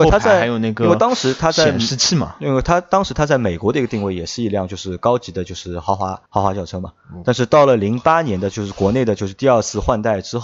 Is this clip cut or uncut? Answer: cut